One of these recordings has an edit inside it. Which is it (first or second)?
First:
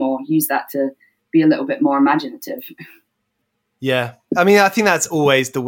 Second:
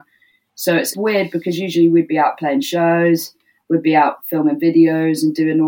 second